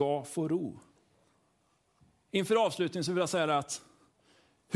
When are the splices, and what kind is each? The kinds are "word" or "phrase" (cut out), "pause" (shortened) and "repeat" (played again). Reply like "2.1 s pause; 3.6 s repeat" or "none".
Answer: 1.2 s pause